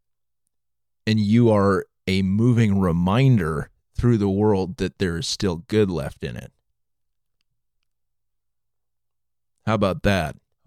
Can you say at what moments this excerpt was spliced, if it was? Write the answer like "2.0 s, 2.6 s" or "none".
none